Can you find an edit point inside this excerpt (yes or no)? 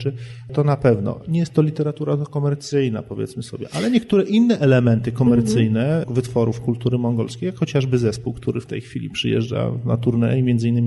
no